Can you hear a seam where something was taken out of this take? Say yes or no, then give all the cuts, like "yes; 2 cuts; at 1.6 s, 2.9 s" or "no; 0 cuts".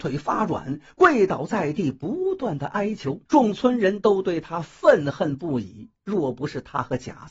yes; 1 cut; at 3.3 s